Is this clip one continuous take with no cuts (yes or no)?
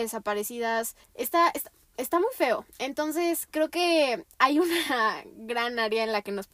no